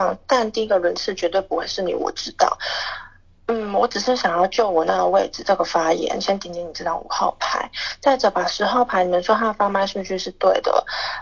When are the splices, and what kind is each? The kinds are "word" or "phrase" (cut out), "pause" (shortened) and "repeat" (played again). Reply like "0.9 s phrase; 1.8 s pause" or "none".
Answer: none